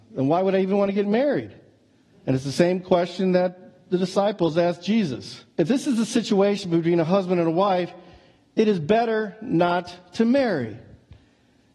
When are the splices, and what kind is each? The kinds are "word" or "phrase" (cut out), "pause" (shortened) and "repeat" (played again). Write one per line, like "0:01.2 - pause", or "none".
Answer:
0:05.5 - pause